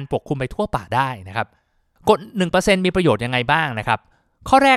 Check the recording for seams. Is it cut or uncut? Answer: uncut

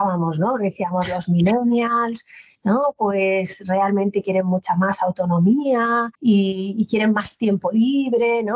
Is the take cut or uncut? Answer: cut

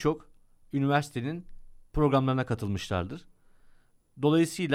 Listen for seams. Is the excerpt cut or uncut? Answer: uncut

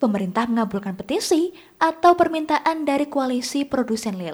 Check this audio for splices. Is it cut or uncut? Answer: uncut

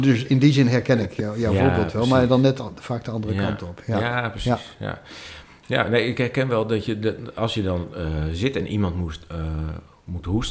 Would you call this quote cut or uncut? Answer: uncut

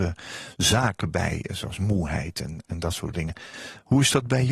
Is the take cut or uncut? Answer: uncut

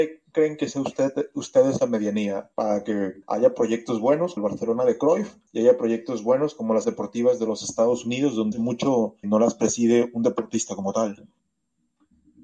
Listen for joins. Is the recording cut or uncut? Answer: cut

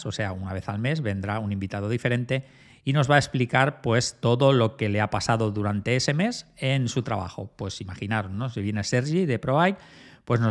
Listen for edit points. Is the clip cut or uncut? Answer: uncut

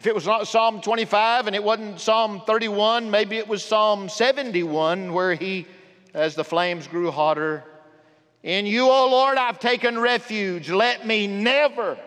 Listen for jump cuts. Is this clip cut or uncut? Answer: uncut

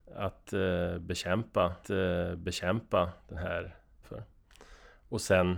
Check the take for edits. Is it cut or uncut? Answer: cut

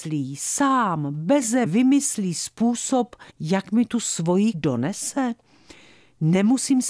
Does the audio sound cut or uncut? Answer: cut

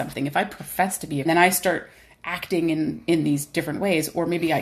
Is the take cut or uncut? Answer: cut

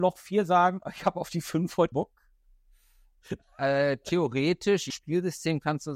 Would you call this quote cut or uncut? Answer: cut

